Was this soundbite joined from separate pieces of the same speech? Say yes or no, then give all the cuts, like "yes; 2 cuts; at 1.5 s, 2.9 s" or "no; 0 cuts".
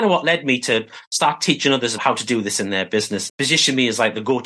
yes; 2 cuts; at 2.0 s, 3.3 s